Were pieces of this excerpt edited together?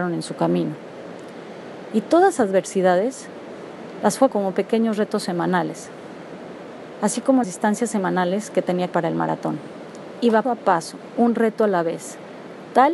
yes; 5 cuts; at 2.4 s, 4.3 s, 7.4 s, 8.9 s, 10.4 s

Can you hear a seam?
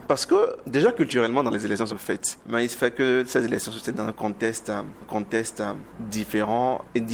yes; 3 cuts; at 1.5 s, 1.9 s, 5.0 s

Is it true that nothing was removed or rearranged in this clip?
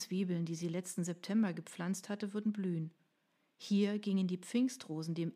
yes; 0 cuts

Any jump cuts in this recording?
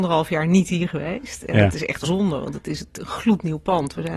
yes; 1 cut; at 2.0 s

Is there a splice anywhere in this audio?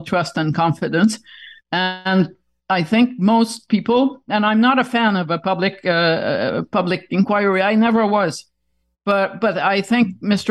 no; 0 cuts

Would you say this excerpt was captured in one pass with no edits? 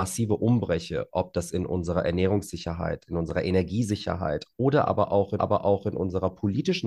no; 1 cut; at 5.4 s

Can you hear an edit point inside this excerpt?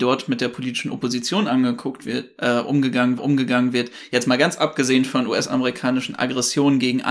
yes; 1 cut; at 3.2 s

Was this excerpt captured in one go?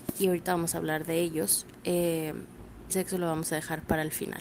no; 1 cut; at 2.9 s

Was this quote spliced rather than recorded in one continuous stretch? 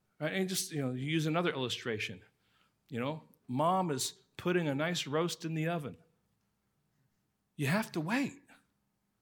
no; 0 cuts

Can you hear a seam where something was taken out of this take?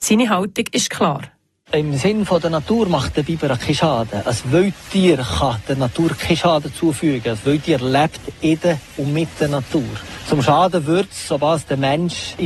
no; 0 cuts

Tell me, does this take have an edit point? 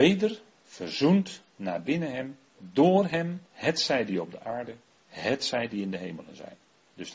yes; 4 cuts; at 1.5 s, 2.5 s, 3.5 s, 4.9 s

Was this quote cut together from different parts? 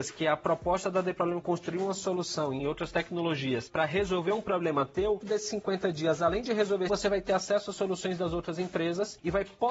yes; 4 cuts; at 1.4 s, 2.6 s, 5.2 s, 6.9 s

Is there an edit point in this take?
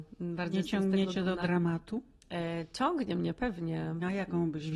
no; 0 cuts

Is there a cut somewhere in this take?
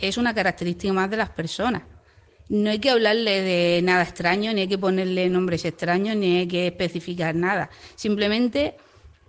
no; 0 cuts

